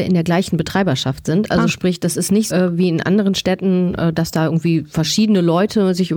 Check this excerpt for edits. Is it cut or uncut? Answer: cut